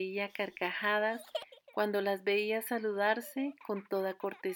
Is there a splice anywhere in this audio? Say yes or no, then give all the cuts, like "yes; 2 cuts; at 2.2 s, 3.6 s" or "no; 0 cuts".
no; 0 cuts